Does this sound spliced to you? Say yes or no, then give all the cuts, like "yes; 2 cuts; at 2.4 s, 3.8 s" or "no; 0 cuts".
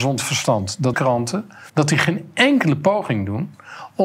yes; 2 cuts; at 0.9 s, 1.7 s